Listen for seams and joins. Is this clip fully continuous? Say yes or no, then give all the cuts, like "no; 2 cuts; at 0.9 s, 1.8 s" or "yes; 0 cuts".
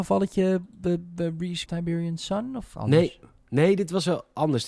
no; 2 cuts; at 1.7 s, 2.7 s